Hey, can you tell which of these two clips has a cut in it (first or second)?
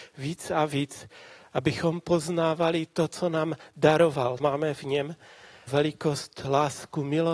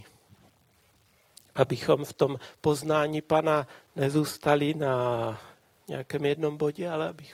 first